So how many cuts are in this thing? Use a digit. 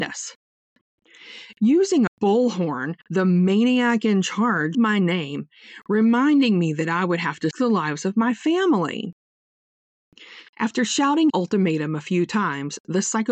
6